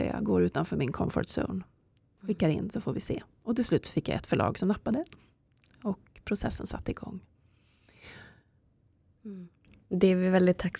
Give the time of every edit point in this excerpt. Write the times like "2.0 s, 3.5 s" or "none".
none